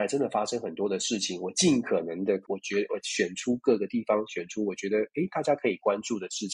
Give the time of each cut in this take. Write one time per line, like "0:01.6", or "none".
0:02.4